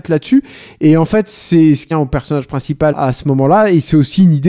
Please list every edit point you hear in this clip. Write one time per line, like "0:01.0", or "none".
0:01.9
0:02.9